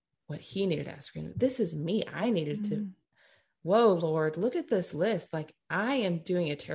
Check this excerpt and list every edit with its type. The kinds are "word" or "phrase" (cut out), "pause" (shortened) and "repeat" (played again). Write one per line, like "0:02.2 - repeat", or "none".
none